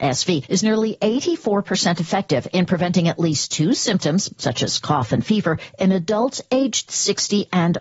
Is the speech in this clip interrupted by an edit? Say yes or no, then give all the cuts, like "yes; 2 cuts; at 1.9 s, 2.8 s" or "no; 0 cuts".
no; 0 cuts